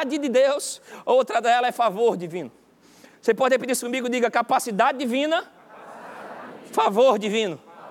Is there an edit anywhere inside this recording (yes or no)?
no